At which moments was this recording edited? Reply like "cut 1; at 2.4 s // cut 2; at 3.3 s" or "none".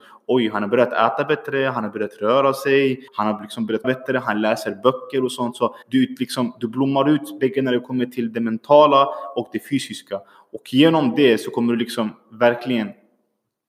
cut 1; at 3.1 s // cut 2; at 3.8 s // cut 3; at 5.8 s